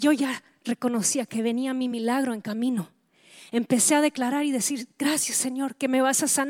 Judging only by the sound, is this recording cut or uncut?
uncut